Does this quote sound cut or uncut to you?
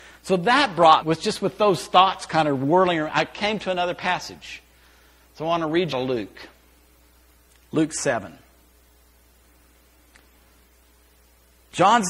cut